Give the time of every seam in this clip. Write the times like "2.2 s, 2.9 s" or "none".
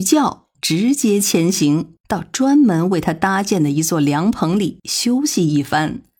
2.0 s